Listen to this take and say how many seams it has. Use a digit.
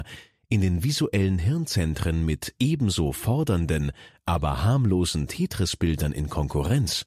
0